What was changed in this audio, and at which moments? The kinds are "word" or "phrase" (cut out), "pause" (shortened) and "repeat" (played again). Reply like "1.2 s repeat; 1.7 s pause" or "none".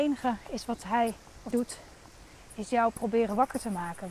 1.5 s word

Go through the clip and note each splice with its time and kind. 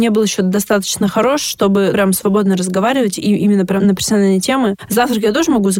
1.9 s word; 3.8 s word

